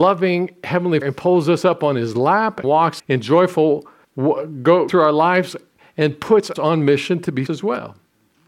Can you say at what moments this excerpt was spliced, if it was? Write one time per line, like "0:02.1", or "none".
0:01.0
0:02.6
0:03.0
0:04.0
0:04.9
0:06.6
0:07.5